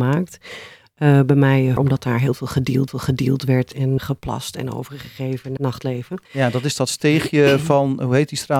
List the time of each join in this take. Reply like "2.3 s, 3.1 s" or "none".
1.8 s, 2.9 s, 4.0 s, 5.6 s, 6.2 s